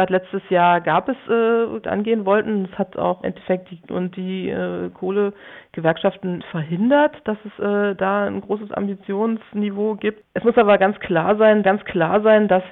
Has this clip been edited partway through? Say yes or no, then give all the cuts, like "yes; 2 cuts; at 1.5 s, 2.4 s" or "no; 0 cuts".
yes; 5 cuts; at 1.8 s, 3.2 s, 3.9 s, 6.4 s, 11.6 s